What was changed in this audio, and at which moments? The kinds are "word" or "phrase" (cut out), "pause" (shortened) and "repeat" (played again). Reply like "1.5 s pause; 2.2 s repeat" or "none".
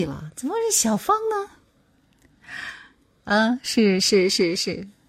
none